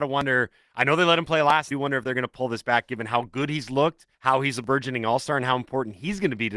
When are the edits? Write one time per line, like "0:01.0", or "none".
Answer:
0:01.7
0:04.1